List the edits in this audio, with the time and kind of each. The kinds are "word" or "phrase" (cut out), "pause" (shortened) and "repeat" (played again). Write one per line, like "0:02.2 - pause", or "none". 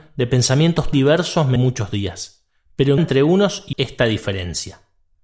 0:00.9 - word
0:01.6 - word
0:03.0 - word
0:03.7 - word